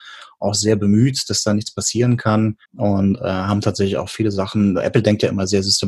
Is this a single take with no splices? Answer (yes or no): no